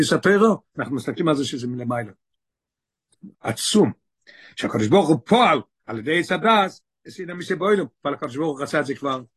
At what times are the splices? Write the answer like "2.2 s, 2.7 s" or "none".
3.3 s

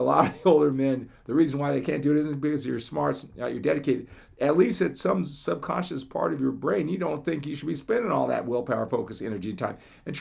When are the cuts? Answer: none

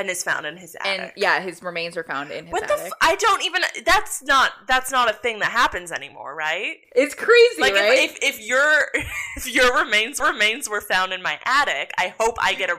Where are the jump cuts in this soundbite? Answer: 10.2 s

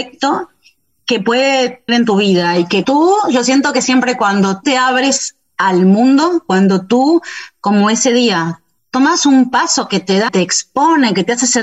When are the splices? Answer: 1.9 s, 2.8 s, 4.6 s, 8.8 s, 10.3 s

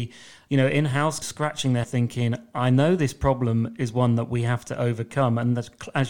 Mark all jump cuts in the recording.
1.2 s, 1.8 s

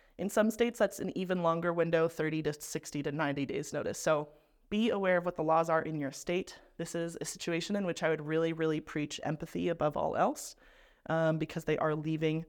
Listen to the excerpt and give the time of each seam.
none

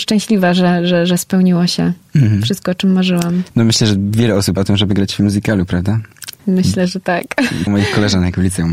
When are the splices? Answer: 3.5 s, 4.6 s, 6.4 s, 7.7 s

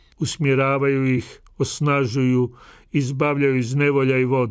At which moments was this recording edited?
none

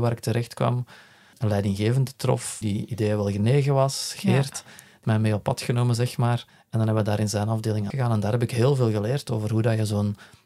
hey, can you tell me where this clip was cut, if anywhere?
1.3 s, 2.6 s, 5.0 s, 6.5 s, 7.9 s

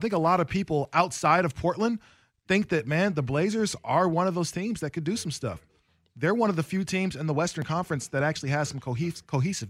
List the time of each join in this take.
none

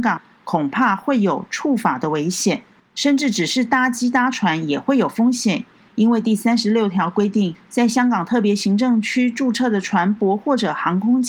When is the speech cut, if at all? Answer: none

